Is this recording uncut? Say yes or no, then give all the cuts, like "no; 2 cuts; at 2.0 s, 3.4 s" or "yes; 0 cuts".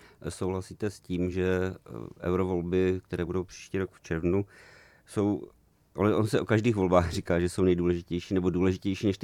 yes; 0 cuts